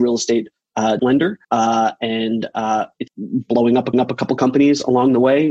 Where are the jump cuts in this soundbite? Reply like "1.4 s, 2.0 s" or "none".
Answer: 1.0 s, 1.4 s, 3.1 s, 3.9 s